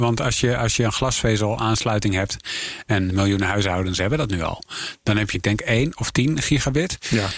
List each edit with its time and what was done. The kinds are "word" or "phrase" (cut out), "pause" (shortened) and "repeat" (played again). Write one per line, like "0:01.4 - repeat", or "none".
0:03.1 - word
0:05.3 - phrase